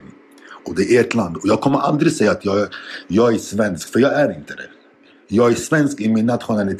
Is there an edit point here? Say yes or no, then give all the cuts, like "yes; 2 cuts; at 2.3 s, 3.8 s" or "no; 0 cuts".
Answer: no; 0 cuts